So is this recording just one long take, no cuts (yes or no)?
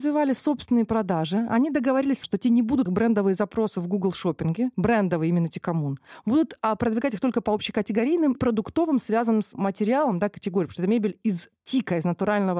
no